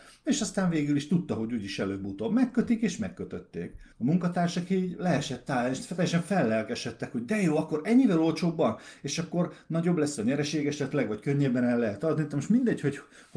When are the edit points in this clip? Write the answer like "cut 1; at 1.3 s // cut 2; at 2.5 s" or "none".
cut 1; at 3.9 s